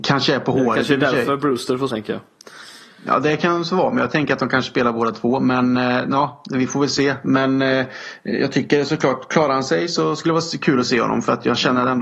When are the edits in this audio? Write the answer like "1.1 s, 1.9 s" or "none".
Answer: 1.9 s